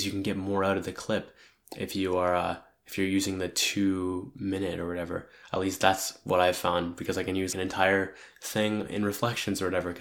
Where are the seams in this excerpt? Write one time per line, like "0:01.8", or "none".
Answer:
0:07.5